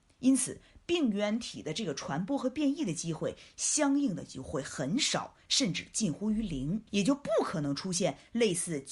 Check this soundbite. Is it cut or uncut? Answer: cut